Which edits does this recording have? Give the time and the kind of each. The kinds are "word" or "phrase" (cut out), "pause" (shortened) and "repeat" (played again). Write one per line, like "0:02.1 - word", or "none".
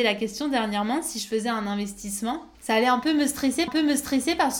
0:02.5 - pause
0:03.7 - repeat